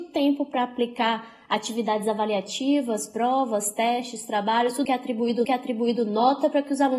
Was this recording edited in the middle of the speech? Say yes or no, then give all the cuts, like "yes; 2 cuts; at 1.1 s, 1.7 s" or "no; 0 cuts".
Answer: yes; 2 cuts; at 4.8 s, 5.4 s